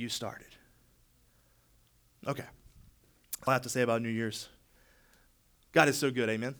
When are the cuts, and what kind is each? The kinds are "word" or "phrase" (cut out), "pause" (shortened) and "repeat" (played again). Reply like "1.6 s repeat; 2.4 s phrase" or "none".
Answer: 3.5 s word

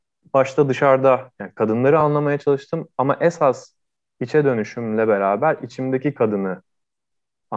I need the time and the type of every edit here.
none

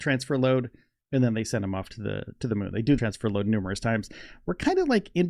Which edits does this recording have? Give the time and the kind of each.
3.0 s phrase

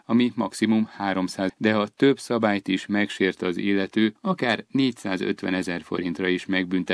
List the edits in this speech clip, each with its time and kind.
1.5 s phrase; 4.2 s pause

